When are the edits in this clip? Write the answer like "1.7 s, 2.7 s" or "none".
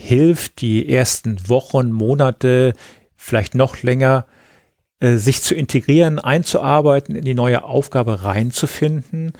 none